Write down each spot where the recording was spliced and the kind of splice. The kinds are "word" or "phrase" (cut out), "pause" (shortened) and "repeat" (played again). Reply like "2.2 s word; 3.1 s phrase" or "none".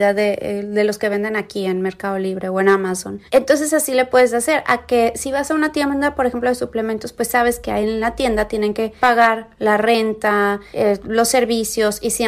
3.3 s pause